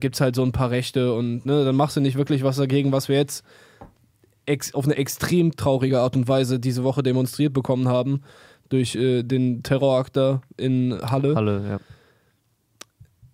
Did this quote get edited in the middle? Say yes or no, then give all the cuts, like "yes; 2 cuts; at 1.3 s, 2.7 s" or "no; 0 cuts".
no; 0 cuts